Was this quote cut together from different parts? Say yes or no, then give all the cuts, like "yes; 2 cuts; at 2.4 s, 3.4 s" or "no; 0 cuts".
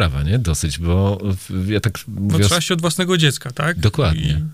yes; 1 cut; at 2.7 s